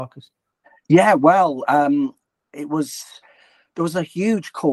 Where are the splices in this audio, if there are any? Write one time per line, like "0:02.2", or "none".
none